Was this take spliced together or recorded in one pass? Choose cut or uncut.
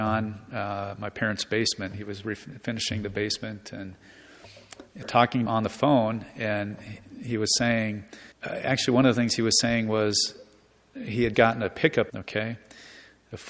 cut